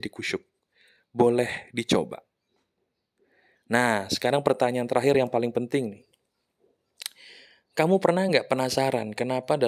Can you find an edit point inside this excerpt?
no; 0 cuts

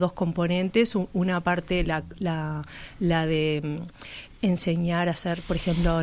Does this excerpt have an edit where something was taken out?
no; 0 cuts

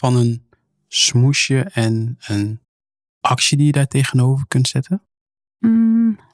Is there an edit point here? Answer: no; 0 cuts

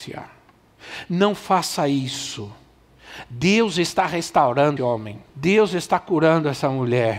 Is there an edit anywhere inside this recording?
yes; 2 cuts; at 4.8 s, 5.3 s

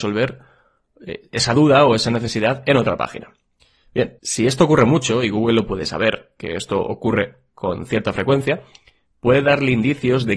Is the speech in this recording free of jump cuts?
no; 1 cut; at 4.2 s

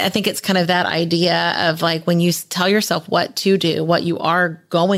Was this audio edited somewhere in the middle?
no; 0 cuts

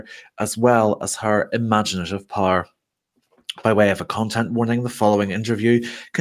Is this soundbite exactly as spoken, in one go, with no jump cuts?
yes; 0 cuts

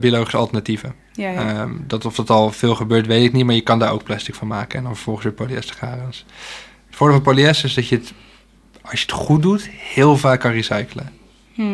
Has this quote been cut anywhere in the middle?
no; 0 cuts

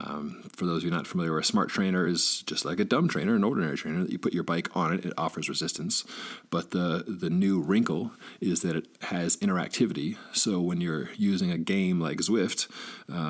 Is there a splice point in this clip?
no; 0 cuts

